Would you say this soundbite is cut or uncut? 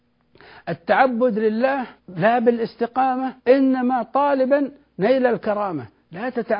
cut